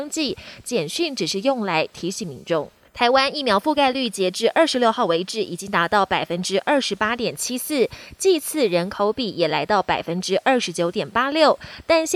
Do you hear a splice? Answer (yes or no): yes